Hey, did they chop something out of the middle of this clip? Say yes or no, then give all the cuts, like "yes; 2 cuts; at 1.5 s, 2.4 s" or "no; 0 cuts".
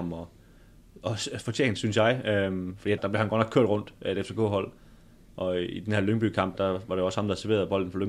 yes; 2 cuts; at 3.0 s, 6.5 s